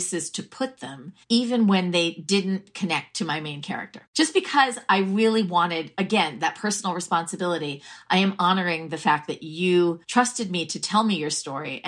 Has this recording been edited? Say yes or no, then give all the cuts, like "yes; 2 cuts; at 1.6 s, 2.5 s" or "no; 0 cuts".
yes; 3 cuts; at 1.2 s, 4.1 s, 10.0 s